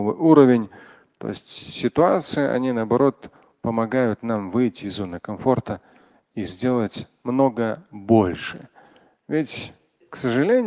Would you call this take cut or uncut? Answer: uncut